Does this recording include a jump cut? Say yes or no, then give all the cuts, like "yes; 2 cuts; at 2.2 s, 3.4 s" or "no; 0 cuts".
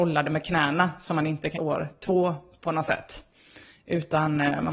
yes; 1 cut; at 1.5 s